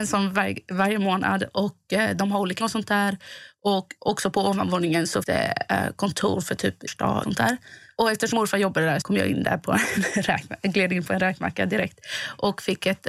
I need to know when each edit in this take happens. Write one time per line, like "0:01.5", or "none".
0:02.6
0:05.2
0:06.9
0:07.2
0:08.3
0:09.0